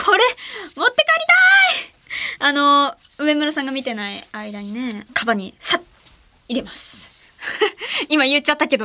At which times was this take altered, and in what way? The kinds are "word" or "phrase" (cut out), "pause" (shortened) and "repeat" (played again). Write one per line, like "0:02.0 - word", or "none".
0:05.1 - phrase

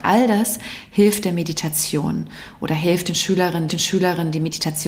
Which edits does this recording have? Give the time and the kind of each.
0:03.7 - repeat

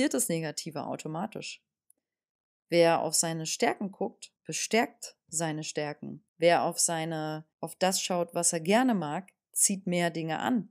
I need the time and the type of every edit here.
0:04.4 - pause
0:06.3 - pause
0:07.5 - pause

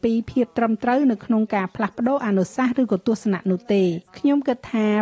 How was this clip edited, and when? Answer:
0:04.1 - pause

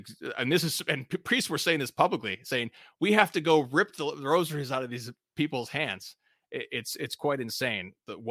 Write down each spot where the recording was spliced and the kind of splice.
none

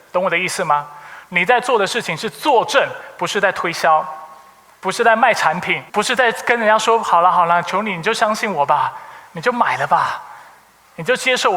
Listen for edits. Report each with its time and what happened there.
0:05.9 - pause

